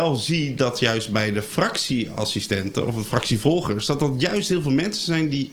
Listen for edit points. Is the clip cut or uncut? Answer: uncut